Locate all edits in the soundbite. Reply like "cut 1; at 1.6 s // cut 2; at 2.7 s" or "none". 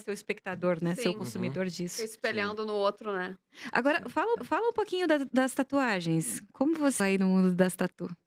cut 1; at 4.4 s // cut 2; at 7.0 s